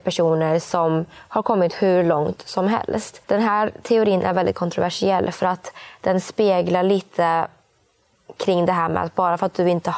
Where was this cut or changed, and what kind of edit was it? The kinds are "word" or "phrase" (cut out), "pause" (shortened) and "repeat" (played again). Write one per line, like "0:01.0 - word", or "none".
0:03.2 - pause